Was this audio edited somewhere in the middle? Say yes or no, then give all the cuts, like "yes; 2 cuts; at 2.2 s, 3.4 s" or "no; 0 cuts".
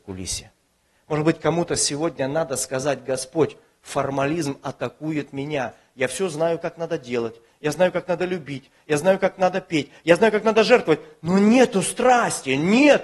no; 0 cuts